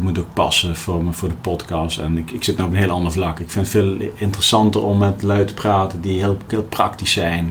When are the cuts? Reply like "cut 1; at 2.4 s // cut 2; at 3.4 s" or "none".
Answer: cut 1; at 6.5 s